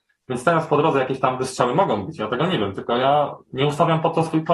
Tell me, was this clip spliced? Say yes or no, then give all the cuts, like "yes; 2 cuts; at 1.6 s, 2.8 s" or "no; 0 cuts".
no; 0 cuts